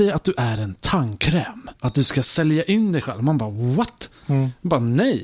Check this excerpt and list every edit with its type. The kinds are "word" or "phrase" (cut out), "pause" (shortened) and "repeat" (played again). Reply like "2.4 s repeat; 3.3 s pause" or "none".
1.8 s pause

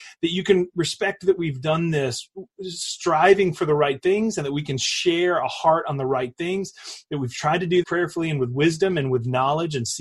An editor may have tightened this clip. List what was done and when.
7.8 s word

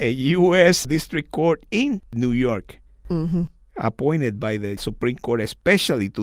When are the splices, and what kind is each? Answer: none

